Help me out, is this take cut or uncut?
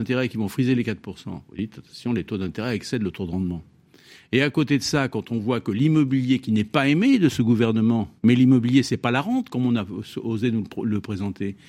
cut